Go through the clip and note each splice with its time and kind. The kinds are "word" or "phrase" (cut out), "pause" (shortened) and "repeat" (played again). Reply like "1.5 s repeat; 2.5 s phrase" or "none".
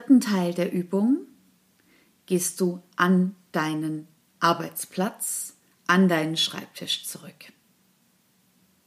none